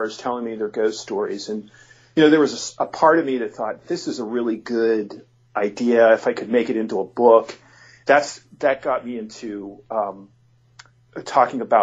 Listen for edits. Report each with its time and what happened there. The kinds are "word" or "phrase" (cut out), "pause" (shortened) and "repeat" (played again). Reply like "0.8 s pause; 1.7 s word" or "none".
none